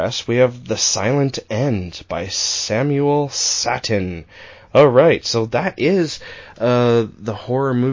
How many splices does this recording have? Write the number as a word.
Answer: zero